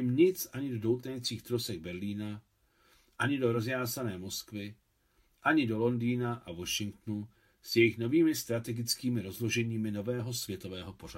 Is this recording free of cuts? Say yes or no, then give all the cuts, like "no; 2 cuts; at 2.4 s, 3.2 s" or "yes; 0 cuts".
yes; 0 cuts